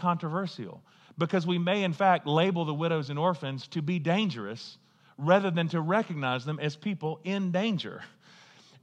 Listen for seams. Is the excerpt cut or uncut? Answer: uncut